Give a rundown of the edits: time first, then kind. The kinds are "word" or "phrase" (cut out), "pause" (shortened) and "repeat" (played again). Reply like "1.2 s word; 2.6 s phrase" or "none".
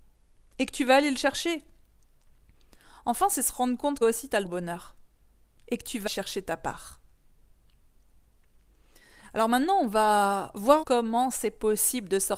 4.0 s word; 4.4 s word; 6.1 s word; 10.8 s word